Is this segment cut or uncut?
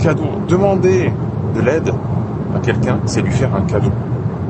uncut